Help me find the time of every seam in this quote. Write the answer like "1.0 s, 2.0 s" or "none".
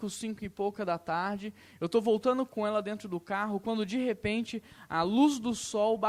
none